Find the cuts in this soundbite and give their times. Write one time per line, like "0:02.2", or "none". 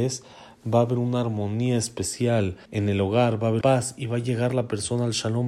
0:02.6
0:03.6